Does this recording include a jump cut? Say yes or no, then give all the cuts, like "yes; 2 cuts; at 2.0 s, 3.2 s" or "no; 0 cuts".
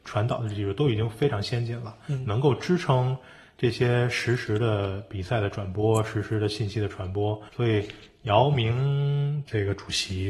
yes; 1 cut; at 7.5 s